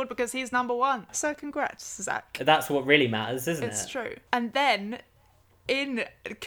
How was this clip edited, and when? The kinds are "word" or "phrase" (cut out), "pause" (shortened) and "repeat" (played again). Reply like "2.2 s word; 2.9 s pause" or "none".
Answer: none